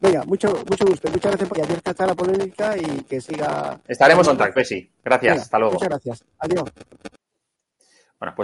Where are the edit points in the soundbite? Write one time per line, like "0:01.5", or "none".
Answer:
0:01.5
0:04.2
0:04.6
0:05.0